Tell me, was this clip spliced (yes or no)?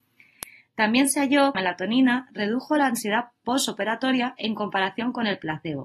yes